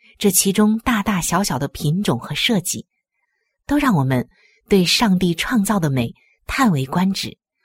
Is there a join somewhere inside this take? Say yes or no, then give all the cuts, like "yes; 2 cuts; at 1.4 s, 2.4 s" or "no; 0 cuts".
no; 0 cuts